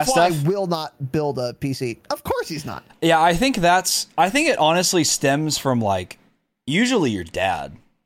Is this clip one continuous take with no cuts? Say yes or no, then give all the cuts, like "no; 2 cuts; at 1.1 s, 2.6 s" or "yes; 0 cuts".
yes; 0 cuts